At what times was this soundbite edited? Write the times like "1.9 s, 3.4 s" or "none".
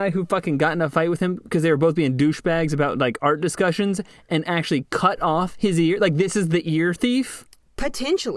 none